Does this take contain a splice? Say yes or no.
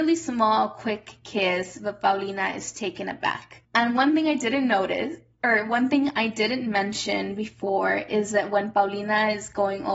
no